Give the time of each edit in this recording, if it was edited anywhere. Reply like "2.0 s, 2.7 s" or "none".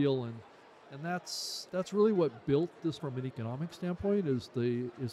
1.7 s, 3.0 s